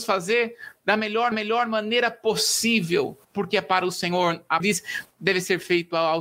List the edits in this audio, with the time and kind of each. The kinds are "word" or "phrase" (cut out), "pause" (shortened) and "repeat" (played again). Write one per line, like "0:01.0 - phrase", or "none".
0:01.3 - repeat
0:03.2 - pause
0:04.6 - phrase
0:05.1 - word